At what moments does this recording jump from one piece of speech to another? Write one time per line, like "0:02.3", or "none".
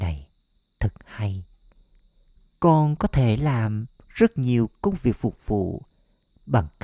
none